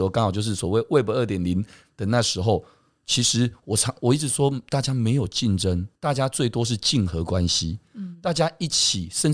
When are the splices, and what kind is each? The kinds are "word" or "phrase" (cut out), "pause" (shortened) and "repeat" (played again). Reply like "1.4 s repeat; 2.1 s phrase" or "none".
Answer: 5.9 s pause

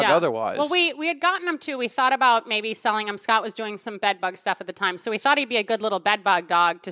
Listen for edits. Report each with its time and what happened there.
none

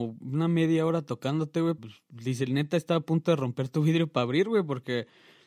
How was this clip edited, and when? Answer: 1.8 s word

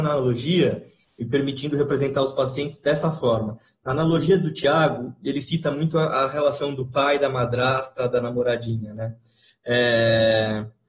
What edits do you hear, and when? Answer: none

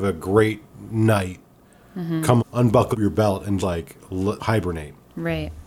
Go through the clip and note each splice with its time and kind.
2.4 s word; 2.9 s word; 3.6 s word; 4.4 s word

